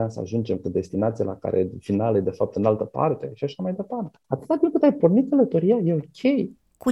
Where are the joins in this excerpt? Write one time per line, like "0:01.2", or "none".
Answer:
0:04.2